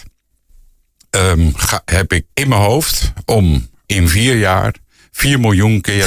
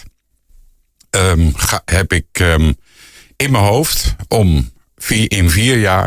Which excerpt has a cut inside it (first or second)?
first